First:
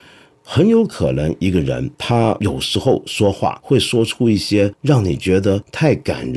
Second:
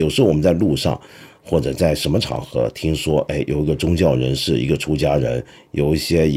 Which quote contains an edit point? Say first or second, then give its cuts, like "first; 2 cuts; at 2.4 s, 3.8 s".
first; 1 cut; at 1.9 s